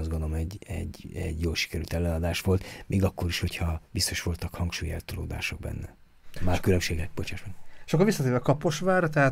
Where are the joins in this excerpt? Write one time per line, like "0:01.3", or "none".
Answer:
0:03.9